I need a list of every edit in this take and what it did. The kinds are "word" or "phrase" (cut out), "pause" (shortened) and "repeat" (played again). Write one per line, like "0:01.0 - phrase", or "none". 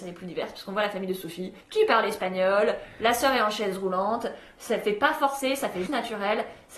0:01.6 - pause
0:05.9 - word